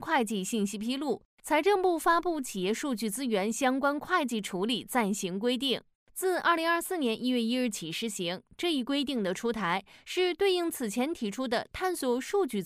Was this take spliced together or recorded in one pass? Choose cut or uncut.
uncut